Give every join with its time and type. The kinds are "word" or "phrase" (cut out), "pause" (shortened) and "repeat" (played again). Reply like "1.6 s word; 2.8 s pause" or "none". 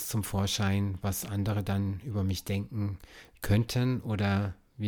none